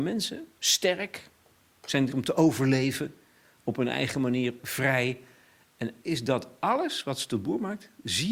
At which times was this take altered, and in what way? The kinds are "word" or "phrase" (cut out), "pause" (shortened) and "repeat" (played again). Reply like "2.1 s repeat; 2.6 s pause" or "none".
2.1 s word; 4.6 s word; 6.0 s word